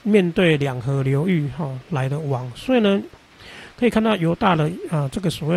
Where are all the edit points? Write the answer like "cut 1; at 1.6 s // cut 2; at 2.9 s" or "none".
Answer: none